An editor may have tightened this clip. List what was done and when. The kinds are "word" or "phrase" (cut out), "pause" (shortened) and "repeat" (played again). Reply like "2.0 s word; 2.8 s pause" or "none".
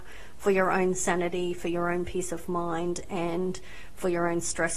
none